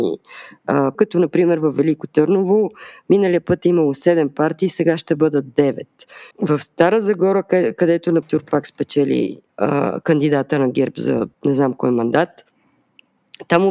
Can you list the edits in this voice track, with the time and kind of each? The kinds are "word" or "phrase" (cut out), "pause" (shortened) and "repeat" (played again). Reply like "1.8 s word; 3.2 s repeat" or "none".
0.9 s word; 6.3 s pause; 8.2 s word; 9.5 s pause; 11.3 s pause